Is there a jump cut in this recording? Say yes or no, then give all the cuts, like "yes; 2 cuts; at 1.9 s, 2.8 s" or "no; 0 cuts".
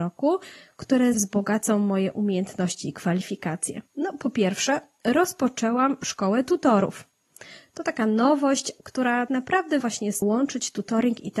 yes; 5 cuts; at 1.1 s, 3.9 s, 9.3 s, 9.8 s, 10.2 s